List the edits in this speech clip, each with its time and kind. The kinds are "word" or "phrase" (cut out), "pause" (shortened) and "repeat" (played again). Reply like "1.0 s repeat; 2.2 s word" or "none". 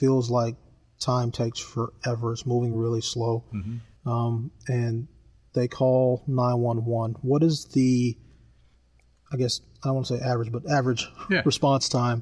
none